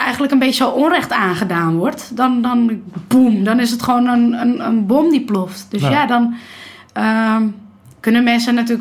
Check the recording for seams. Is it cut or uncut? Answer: uncut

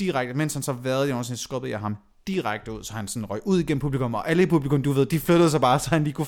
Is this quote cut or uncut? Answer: uncut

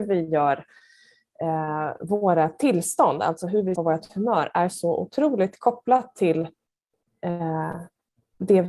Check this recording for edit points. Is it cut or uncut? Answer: cut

